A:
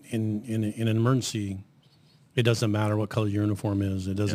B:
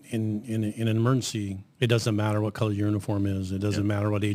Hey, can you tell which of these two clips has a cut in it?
B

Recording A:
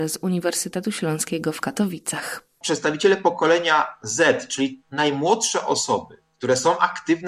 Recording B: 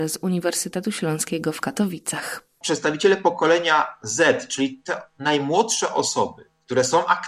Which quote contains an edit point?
A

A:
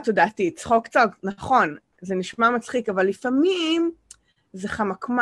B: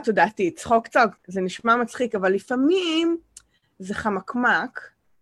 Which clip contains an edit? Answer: B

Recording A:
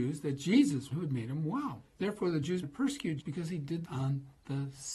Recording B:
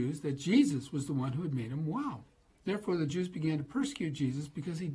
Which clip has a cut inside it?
A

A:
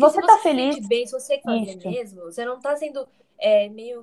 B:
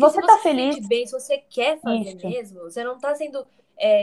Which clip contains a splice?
A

